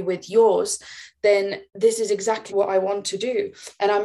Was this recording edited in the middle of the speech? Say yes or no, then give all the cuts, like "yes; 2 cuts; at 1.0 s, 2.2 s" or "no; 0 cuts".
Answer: yes; 2 cuts; at 1.7 s, 2.5 s